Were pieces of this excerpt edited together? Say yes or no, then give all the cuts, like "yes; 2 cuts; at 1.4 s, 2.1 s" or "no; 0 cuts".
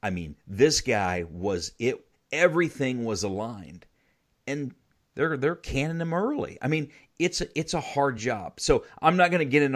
no; 0 cuts